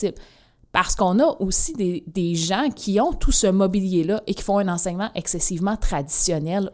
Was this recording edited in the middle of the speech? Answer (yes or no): no